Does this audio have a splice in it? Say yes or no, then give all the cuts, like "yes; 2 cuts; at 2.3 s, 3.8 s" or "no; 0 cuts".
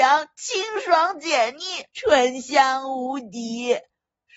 yes; 1 cut; at 1.9 s